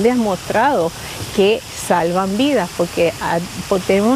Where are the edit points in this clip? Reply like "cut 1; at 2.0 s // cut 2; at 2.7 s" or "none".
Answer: none